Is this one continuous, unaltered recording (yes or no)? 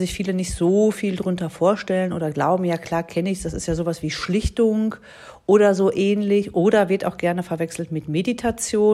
yes